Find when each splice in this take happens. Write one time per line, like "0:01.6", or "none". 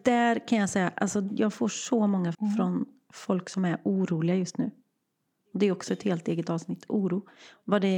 0:02.3